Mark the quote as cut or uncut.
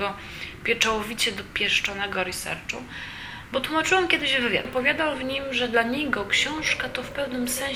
cut